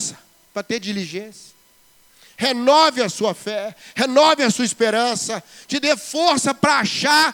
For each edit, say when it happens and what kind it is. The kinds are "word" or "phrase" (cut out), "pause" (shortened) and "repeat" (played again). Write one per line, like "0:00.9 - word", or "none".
none

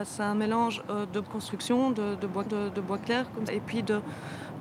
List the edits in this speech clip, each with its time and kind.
0:01.2 - word
0:02.5 - repeat
0:03.5 - word

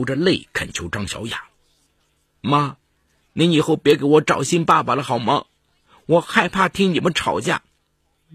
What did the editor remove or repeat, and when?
none

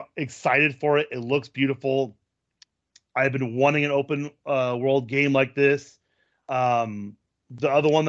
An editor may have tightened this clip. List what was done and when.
none

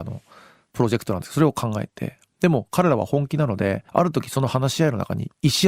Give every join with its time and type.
0:03.9 - pause

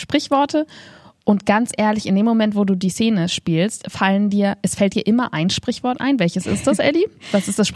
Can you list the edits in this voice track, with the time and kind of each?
0:04.6 - word

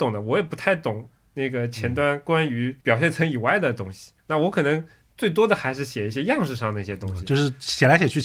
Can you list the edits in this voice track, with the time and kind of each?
0:02.8 - pause
0:04.2 - pause

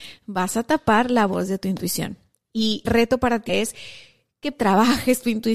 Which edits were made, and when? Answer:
0:02.9 - word
0:03.5 - word
0:04.5 - word

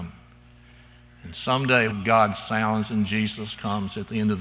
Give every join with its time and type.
0:01.9 - phrase

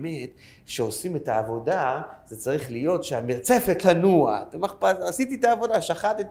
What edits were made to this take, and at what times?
0:03.8 - word

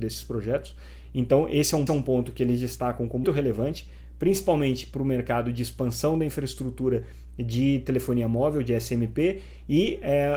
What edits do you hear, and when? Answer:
0:01.9 - repeat
0:03.2 - word

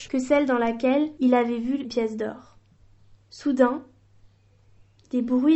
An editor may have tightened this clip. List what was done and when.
0:01.8 - word

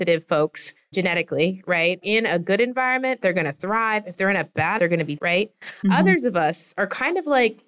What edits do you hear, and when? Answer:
0:00.9 - word
0:02.0 - word
0:04.8 - word
0:05.2 - word

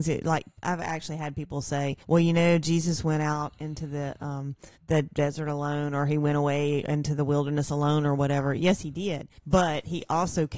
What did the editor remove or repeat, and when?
0:02.0 - pause
0:04.8 - pause
0:09.4 - pause

